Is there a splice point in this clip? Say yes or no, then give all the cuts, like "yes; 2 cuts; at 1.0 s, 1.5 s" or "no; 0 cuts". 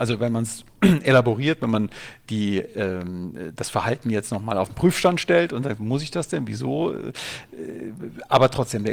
no; 0 cuts